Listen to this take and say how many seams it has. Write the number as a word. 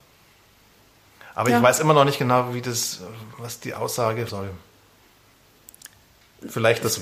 one